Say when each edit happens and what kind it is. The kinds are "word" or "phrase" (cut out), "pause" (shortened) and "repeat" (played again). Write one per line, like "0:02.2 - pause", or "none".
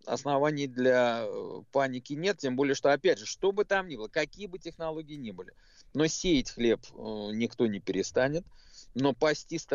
none

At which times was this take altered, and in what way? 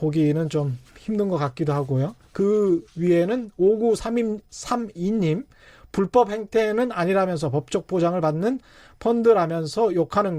none

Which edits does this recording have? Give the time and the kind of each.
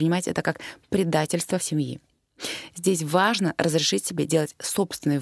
0:01.6 - word

